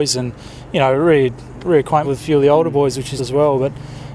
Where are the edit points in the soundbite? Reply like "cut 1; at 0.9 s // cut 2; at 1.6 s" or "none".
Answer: cut 1; at 2.0 s // cut 2; at 3.2 s

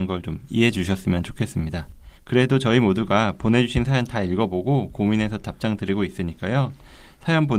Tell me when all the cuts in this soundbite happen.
cut 1; at 2.2 s

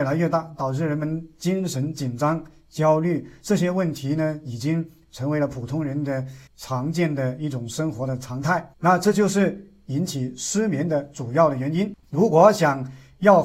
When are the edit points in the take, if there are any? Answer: cut 1; at 6.5 s // cut 2; at 8.7 s

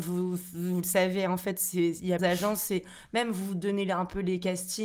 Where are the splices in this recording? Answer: cut 1; at 2.2 s

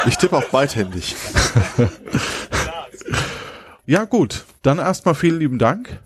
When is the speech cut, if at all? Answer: cut 1; at 3.8 s

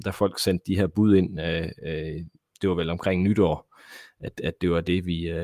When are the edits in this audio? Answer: none

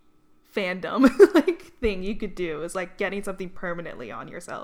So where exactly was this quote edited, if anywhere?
none

